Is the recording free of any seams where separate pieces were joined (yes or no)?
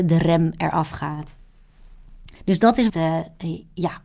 no